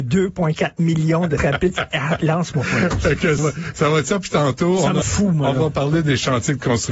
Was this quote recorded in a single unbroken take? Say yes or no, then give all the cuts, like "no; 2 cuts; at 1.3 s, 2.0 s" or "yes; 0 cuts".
no; 3 cuts; at 1.4 s, 3.4 s, 5.0 s